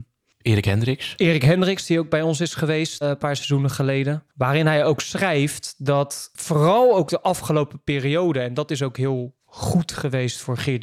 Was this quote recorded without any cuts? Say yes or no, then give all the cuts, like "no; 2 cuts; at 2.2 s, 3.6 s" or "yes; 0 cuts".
no; 1 cut; at 3.0 s